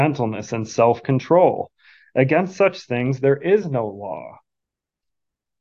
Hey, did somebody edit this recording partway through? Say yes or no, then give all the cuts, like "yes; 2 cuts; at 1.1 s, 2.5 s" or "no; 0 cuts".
no; 0 cuts